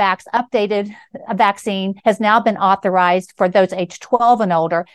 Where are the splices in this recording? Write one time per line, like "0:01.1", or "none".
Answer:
0:01.3
0:02.0
0:03.3